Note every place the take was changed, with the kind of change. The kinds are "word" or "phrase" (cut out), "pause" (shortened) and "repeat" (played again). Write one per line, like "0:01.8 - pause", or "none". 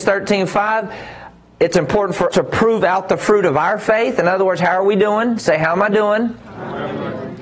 0:02.3 - word